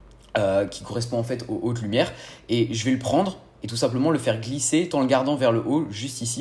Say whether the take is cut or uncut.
cut